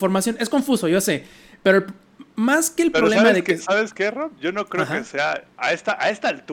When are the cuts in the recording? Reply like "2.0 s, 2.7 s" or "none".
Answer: none